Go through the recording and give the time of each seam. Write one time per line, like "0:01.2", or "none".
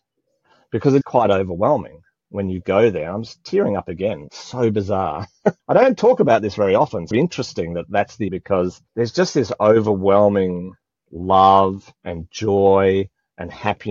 0:01.0
0:04.3
0:05.6
0:07.1
0:08.3
0:08.9
0:12.0